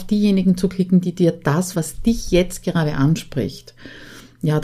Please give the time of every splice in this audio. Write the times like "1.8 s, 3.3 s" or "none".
1.7 s